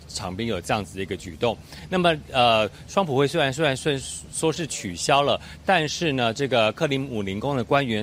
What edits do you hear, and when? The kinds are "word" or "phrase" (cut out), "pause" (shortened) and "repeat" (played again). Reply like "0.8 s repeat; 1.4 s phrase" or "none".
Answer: none